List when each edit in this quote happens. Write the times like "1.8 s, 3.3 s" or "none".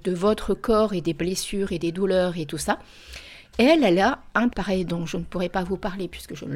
4.5 s